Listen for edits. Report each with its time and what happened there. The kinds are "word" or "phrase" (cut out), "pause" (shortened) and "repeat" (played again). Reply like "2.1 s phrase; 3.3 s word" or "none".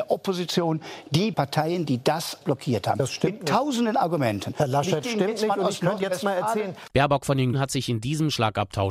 1.3 s word; 2.4 s word; 5.0 s word; 6.0 s word; 7.5 s word